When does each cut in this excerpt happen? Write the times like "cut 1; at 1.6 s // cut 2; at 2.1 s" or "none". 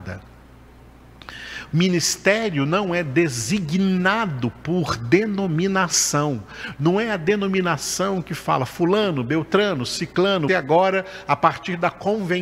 cut 1; at 10.5 s

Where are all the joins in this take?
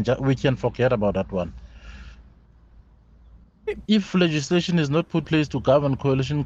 cut 1; at 3.9 s // cut 2; at 5.2 s

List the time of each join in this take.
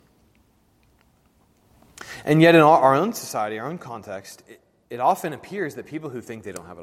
none

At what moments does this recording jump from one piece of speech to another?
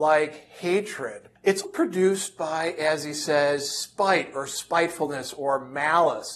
cut 1; at 1.6 s

